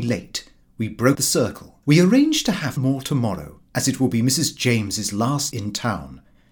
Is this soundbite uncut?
no; 5 cuts; at 1.1 s, 1.8 s, 2.8 s, 3.7 s, 5.5 s

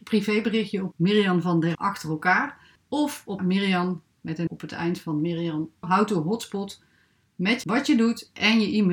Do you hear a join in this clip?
yes; 6 cuts; at 0.9 s, 1.7 s, 3.4 s, 4.5 s, 5.8 s, 7.6 s

